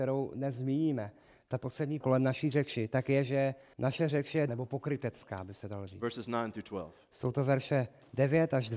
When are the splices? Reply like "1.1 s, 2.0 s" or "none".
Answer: 2.0 s, 3.7 s, 4.5 s